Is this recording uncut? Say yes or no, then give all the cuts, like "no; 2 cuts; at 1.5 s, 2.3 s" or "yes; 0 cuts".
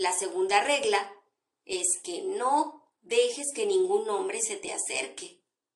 yes; 0 cuts